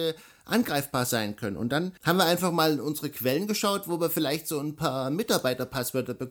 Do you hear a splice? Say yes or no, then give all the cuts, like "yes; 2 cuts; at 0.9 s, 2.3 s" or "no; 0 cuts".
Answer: yes; 1 cut; at 2.0 s